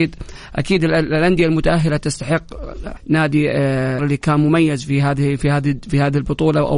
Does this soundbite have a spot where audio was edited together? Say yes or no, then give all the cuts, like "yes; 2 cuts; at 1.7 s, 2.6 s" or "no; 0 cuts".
yes; 2 cuts; at 3.0 s, 4.0 s